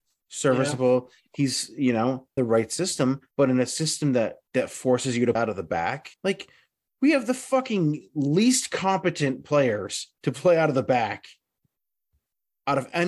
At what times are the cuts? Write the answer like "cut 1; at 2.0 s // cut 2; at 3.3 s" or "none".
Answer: cut 1; at 2.4 s // cut 2; at 3.3 s // cut 3; at 4.5 s // cut 4; at 5.4 s // cut 5; at 6.1 s // cut 6; at 10.2 s